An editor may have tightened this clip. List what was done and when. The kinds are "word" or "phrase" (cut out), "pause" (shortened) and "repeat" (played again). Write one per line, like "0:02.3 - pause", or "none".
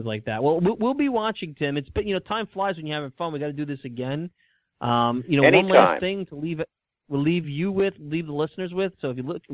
none